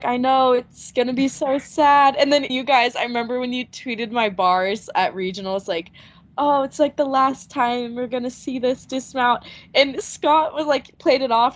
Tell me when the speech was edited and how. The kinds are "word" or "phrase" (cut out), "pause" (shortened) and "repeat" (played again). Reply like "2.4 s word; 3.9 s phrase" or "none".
2.5 s word